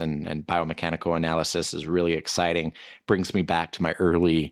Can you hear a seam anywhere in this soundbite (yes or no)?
no